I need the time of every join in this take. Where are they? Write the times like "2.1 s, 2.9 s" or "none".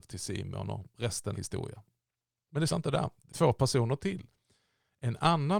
1.3 s, 2.7 s, 3.3 s